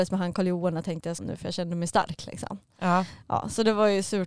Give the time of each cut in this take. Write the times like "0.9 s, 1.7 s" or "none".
1.2 s